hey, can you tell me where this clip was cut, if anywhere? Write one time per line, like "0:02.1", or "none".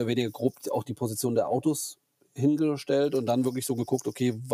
none